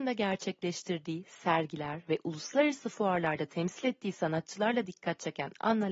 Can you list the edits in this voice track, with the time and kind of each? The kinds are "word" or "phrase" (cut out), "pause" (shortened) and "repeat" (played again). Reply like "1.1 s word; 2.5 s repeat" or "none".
none